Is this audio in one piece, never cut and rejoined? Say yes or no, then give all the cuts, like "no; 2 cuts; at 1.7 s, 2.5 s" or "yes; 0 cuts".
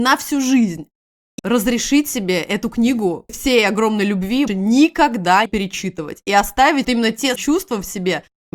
no; 6 cuts; at 1.4 s, 3.3 s, 4.5 s, 5.5 s, 6.8 s, 7.4 s